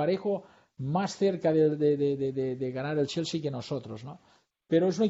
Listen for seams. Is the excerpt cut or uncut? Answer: uncut